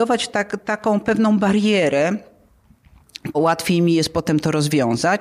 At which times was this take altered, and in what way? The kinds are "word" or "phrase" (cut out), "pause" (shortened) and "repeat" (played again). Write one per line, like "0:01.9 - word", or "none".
0:03.3 - word

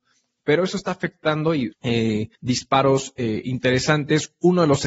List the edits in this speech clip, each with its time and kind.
0:01.7 - phrase
0:02.4 - pause

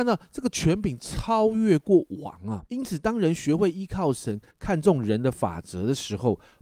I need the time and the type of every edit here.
0:02.7 - pause

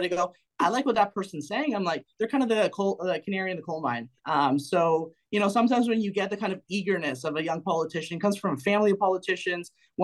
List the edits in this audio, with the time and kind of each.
0:04.2 - pause

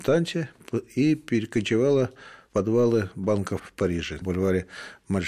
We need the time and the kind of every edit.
0:02.5 - word
0:03.6 - word
0:04.2 - word

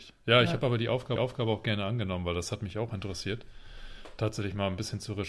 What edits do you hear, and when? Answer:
0:01.2 - repeat

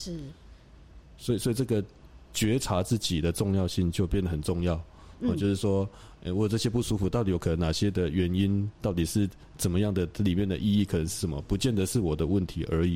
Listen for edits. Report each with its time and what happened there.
0:08.7 - pause

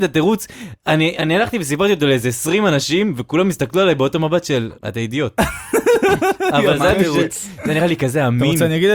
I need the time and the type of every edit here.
0:04.8 - pause

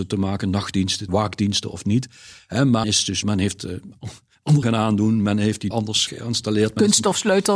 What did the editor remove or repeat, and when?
0:01.1 - word
0:02.8 - word
0:03.2 - word
0:04.6 - word
0:05.7 - word
0:06.1 - word

